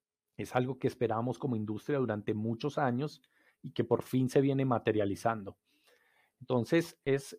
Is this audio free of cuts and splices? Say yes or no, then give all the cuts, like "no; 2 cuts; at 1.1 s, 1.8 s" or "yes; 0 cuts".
yes; 0 cuts